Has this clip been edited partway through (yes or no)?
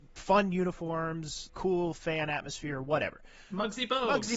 yes